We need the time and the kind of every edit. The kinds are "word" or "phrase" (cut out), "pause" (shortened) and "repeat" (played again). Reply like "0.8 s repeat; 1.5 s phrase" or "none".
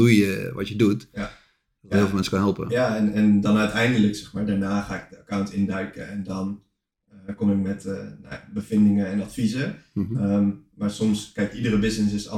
none